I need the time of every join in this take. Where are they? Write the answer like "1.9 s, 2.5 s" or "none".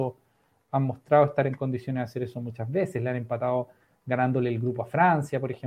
none